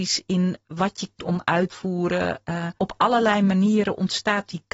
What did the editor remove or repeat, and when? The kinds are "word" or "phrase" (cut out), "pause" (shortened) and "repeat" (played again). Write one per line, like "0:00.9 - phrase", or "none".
0:01.2 - word
0:01.7 - word
0:02.8 - pause